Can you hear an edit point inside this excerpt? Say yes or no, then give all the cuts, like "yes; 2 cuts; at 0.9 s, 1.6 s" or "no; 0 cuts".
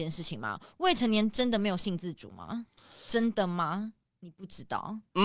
no; 0 cuts